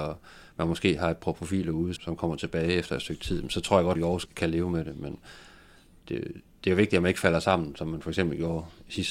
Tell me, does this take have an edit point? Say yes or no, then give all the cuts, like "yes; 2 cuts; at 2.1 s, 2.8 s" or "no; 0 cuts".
yes; 3 cuts; at 2.0 s, 3.9 s, 4.3 s